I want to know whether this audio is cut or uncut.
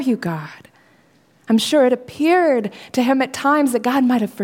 uncut